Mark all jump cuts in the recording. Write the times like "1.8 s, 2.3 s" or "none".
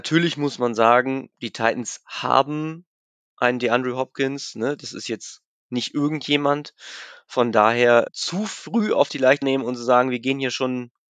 8.1 s, 9.4 s